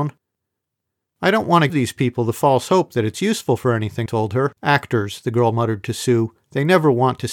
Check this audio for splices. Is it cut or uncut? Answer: cut